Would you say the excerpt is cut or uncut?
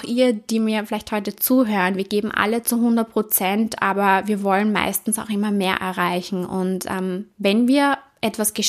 uncut